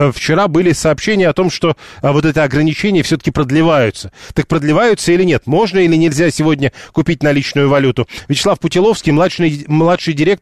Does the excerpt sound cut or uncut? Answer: uncut